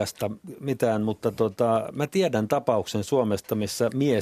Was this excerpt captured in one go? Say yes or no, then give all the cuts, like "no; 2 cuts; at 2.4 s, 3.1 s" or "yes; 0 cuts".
yes; 0 cuts